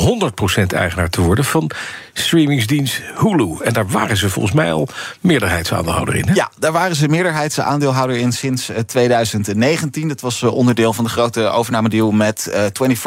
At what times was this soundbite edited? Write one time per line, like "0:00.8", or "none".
none